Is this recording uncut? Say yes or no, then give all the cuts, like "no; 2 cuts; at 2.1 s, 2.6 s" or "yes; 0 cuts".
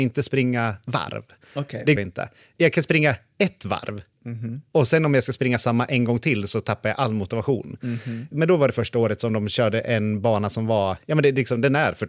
no; 1 cut; at 2.0 s